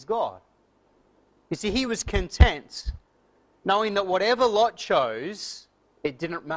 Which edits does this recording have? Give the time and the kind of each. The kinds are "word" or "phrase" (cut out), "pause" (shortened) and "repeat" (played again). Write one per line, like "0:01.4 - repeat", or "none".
none